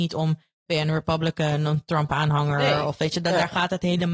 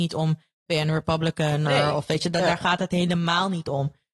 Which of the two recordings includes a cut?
second; 1 cut; at 1.7 s

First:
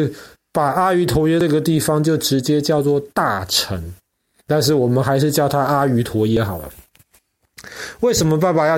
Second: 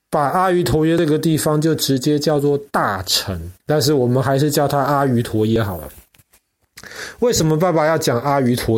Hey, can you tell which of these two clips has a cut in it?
second; 1 cut; at 3.6 s

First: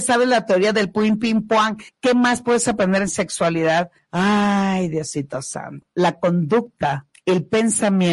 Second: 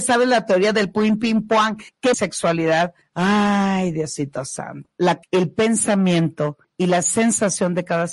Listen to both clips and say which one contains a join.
second; 2 cuts; at 2.1 s, 5.2 s

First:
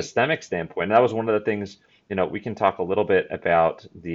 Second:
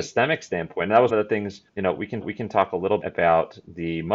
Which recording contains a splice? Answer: second; 4 cuts; at 1.1 s, 1.7 s, 2.2 s, 3.0 s

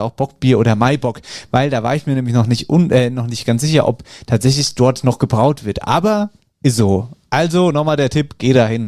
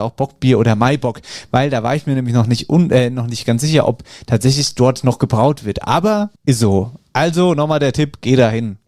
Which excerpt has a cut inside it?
second; 1 cut; at 6.4 s

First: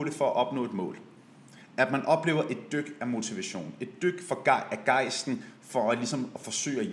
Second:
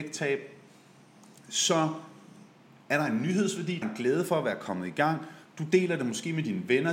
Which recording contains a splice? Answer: second; 1 cut; at 3.8 s

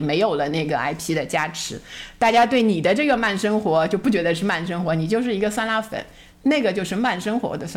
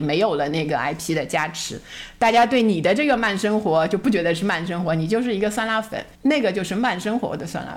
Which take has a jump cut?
second; 1 cut; at 6.1 s

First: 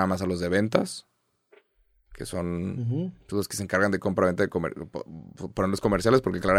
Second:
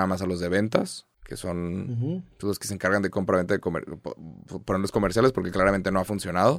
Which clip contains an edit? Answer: second; 1 cut; at 1.1 s

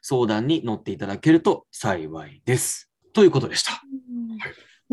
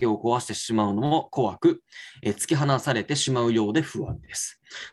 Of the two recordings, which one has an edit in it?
first; 1 cut; at 3.0 s

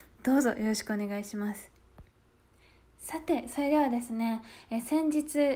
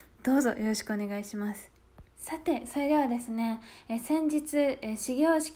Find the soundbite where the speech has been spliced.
second; 1 cut; at 2.1 s

